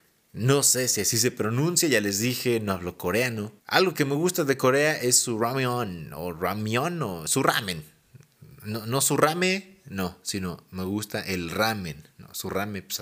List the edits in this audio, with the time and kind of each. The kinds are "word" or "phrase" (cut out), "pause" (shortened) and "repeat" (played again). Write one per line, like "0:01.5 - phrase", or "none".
0:03.6 - pause